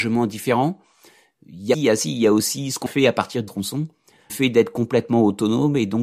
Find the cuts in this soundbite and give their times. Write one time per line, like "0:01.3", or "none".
0:01.7
0:02.9
0:03.5
0:04.3